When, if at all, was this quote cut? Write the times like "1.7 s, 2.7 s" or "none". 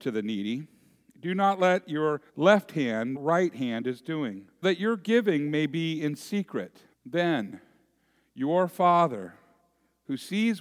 2.3 s, 3.2 s, 4.6 s, 6.9 s